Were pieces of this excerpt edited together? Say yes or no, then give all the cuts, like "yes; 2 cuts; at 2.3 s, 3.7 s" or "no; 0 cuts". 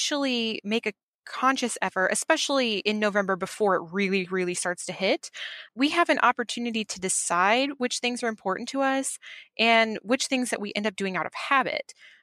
no; 0 cuts